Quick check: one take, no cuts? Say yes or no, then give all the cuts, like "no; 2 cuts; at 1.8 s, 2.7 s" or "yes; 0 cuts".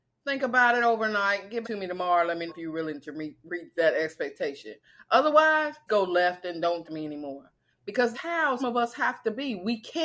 no; 7 cuts; at 1.6 s, 2.5 s, 3.7 s, 5.9 s, 6.8 s, 8.1 s, 8.6 s